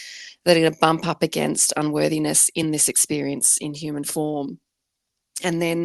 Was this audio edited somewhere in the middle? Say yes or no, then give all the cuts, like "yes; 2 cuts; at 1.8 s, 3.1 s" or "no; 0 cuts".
no; 0 cuts